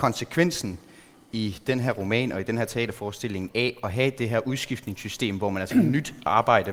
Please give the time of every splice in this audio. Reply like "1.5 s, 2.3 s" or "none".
5.7 s